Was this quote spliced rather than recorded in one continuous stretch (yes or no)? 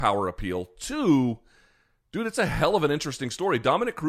no